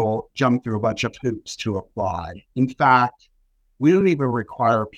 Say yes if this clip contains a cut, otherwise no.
no